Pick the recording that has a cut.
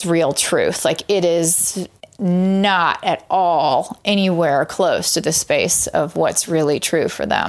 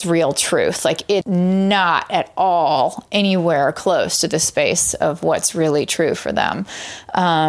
second; 1 cut; at 1.2 s

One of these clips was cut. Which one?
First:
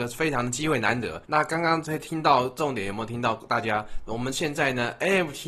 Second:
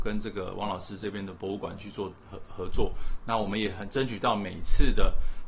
first; 1 cut; at 1.2 s

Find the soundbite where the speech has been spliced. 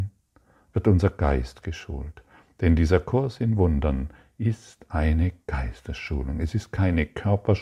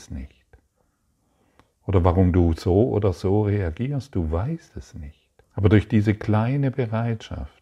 second; 1 cut; at 5.4 s

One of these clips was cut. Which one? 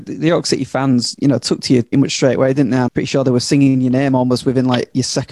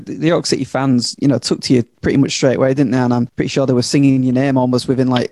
first; 2 cuts; at 1.9 s, 2.9 s

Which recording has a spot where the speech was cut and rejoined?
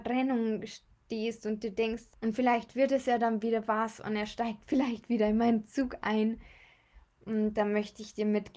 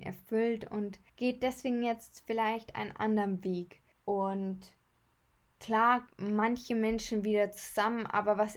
second; 3 cuts; at 1.1 s, 3.9 s, 6.1 s

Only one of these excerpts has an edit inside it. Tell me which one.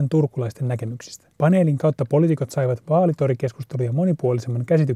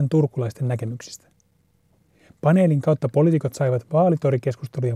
first; 1 cut; at 1.3 s

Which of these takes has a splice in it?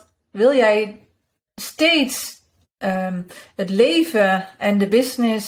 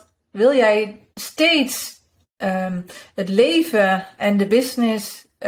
second; 1 cut; at 1.1 s

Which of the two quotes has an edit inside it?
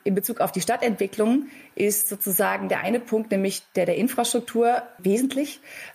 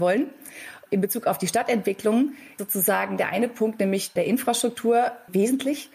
second; 2 cuts; at 2.6 s, 4.2 s

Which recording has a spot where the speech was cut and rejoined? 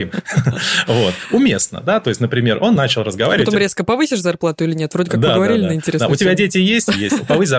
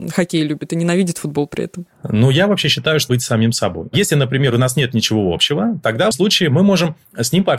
second; 2 cuts; at 3.1 s, 6.1 s

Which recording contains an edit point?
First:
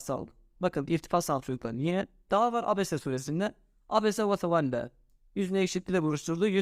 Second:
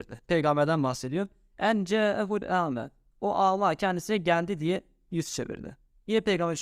first; 1 cut; at 2.3 s

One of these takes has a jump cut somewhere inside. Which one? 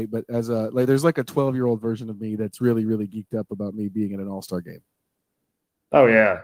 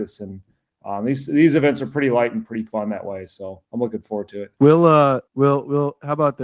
second; 3 cuts; at 3.6 s, 4.5 s, 5.3 s

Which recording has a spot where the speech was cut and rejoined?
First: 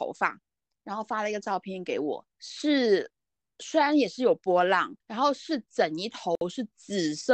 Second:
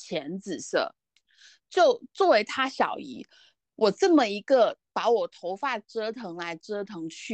first; 2 cuts; at 2.3 s, 5.0 s

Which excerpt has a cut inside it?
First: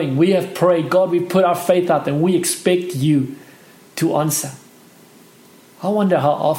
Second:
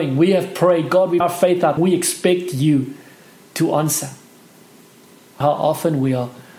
second; 3 cuts; at 1.2 s, 1.8 s, 5.4 s

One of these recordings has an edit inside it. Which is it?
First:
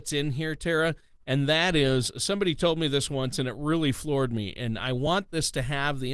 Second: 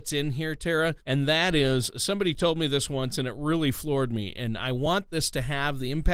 second; 1 cut; at 1.0 s

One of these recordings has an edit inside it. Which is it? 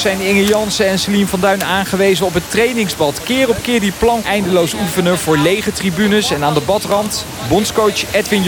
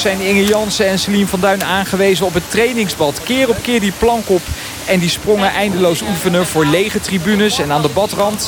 first; 1 cut; at 4.2 s

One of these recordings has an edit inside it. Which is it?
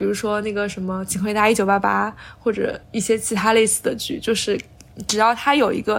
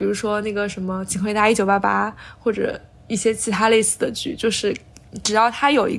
first; 1 cut; at 2.8 s

